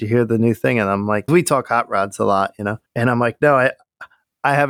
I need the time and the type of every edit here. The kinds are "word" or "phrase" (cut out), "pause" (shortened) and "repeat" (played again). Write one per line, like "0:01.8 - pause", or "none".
0:01.3 - phrase
0:02.9 - pause